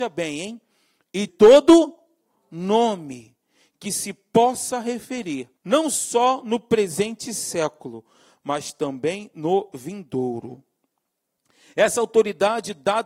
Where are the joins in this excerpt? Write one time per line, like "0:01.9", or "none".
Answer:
0:01.3
0:05.6